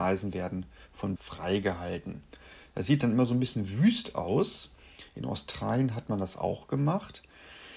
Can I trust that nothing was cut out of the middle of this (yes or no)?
no